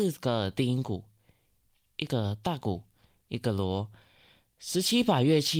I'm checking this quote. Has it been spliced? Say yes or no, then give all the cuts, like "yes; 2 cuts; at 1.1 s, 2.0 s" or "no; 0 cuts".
no; 0 cuts